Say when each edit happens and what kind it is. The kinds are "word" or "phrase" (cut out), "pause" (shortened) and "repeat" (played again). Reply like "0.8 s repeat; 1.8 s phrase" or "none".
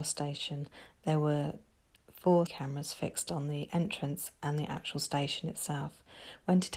2.5 s word